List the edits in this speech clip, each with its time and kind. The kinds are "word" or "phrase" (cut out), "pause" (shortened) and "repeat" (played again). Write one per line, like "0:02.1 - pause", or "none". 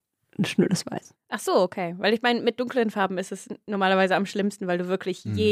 none